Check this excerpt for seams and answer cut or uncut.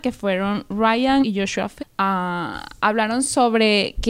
cut